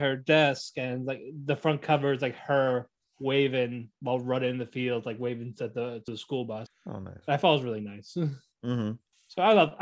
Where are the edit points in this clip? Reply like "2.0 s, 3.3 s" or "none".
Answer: none